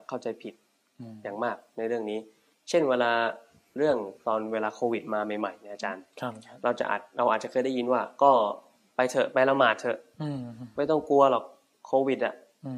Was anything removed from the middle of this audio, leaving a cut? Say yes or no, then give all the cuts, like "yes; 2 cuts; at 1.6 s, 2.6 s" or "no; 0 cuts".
no; 0 cuts